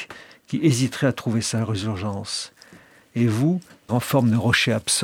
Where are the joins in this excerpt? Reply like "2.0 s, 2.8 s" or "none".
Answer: 3.9 s